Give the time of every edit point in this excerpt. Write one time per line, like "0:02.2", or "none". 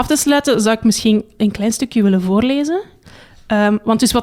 none